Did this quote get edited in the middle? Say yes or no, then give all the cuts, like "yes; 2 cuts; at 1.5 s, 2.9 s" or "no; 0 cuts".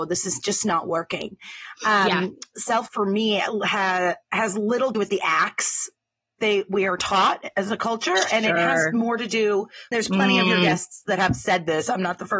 yes; 5 cuts; at 2.9 s, 4.2 s, 4.9 s, 6.4 s, 9.9 s